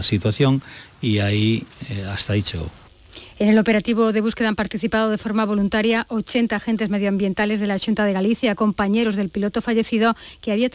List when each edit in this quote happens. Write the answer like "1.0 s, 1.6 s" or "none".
none